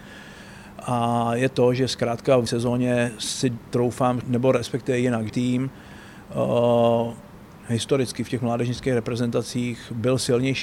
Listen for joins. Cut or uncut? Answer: cut